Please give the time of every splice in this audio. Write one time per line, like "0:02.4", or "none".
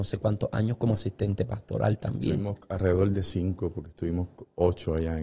none